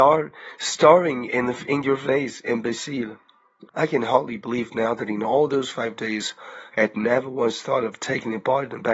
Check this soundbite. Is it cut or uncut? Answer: cut